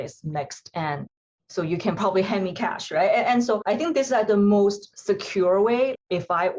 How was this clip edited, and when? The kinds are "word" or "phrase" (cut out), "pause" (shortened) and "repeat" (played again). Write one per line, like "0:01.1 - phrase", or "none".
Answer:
none

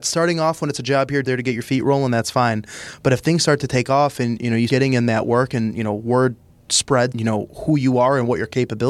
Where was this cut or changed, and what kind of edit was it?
0:01.2 - word
0:04.7 - word
0:07.1 - word

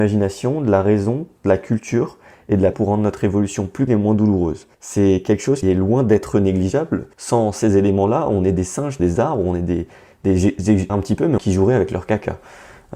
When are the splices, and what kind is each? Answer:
0:02.7 - word
0:03.9 - word
0:04.7 - pause
0:05.6 - word
0:07.1 - pause
0:09.0 - phrase
0:10.9 - word
0:11.4 - phrase

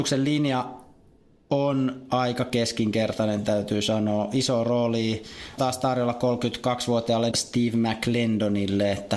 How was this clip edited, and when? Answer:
0:05.6 - word
0:07.3 - phrase

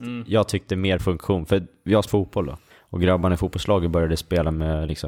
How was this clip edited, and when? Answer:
0:01.0 - word
0:02.1 - word
0:02.7 - pause

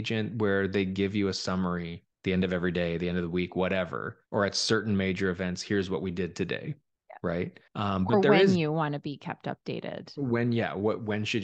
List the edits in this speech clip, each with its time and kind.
0:02.1 - pause
0:04.3 - pause
0:06.9 - pause
0:07.7 - pause

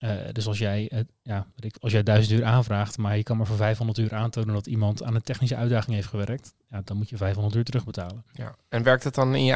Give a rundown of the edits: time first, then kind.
none

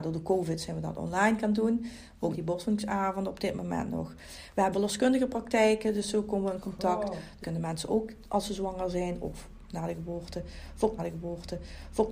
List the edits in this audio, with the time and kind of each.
0:02.3 - phrase
0:04.7 - phrase
0:07.4 - word
0:11.0 - repeat

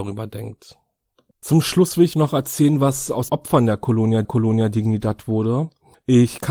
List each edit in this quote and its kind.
0:01.1 - pause
0:02.1 - word
0:03.3 - word
0:04.2 - repeat

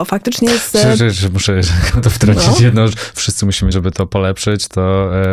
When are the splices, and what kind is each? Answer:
0:03.7 - word

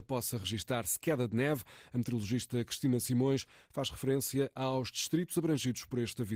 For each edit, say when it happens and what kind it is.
none

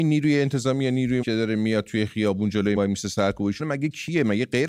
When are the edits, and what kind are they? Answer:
0:01.2 - word
0:02.8 - word
0:03.6 - word

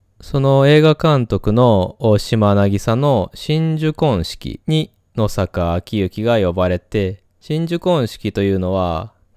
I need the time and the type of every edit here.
0:07.3 - pause

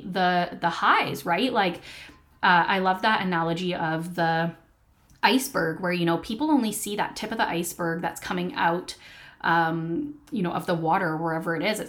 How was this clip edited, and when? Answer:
none

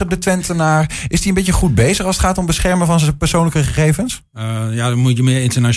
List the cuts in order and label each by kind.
none

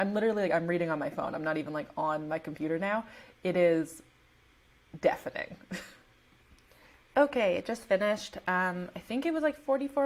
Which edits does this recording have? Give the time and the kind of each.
none

